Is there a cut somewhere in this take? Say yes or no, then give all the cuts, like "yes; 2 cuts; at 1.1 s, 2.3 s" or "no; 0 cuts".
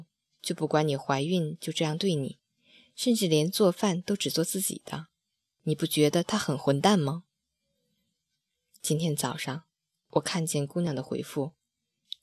no; 0 cuts